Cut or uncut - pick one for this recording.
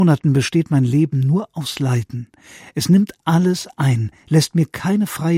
uncut